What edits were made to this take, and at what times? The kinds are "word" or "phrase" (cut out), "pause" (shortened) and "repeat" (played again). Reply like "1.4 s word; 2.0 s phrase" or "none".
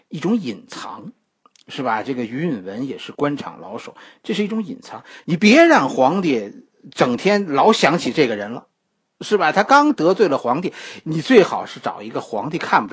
none